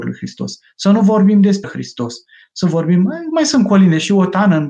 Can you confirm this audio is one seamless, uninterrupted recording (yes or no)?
no